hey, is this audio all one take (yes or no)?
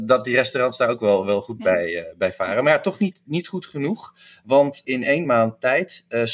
yes